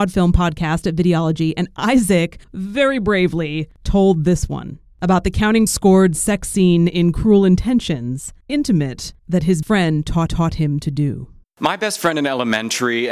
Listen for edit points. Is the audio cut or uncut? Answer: cut